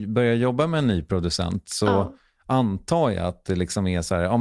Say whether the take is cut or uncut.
uncut